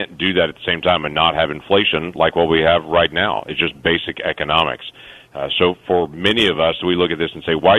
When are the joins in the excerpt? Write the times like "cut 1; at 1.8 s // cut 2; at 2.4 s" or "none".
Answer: none